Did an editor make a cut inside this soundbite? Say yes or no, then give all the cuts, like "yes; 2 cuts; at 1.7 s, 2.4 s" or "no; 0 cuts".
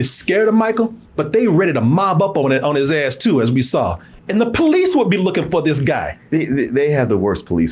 yes; 2 cuts; at 1.1 s, 4.2 s